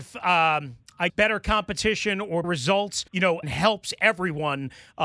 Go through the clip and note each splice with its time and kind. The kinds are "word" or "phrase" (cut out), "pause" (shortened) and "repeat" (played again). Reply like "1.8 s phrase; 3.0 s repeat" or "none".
1.1 s word; 2.4 s word; 3.1 s pause; 3.4 s word